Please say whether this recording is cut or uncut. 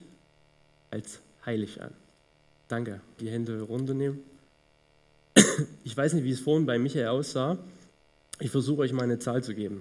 cut